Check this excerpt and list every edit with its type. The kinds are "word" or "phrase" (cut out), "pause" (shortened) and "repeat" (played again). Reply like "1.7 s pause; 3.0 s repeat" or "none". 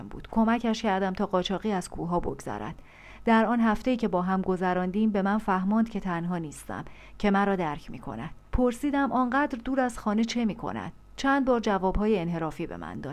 8.5 s pause